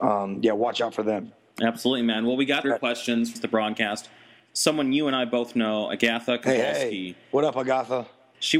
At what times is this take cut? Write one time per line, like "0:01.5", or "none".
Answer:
0:02.6
0:03.3
0:05.9